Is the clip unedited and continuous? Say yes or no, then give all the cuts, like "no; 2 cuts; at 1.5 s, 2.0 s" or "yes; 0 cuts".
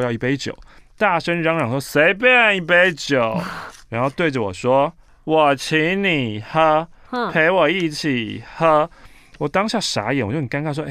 yes; 0 cuts